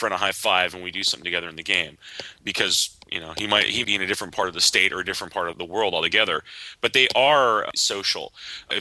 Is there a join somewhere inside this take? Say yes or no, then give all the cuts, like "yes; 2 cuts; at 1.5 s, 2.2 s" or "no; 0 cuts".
yes; 4 cuts; at 3.0 s, 3.8 s, 5.5 s, 7.7 s